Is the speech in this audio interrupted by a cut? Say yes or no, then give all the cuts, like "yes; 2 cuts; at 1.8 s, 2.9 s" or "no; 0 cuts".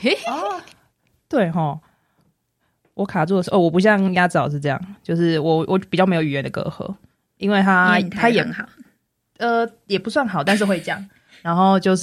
no; 0 cuts